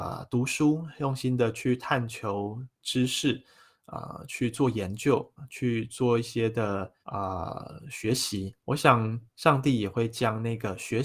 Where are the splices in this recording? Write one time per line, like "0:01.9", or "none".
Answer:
0:05.4
0:07.0
0:08.6
0:09.3